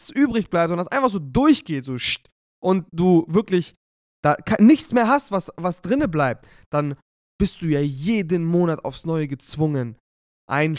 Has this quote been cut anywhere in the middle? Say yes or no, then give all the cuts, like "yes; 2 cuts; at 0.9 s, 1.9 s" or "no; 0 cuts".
no; 0 cuts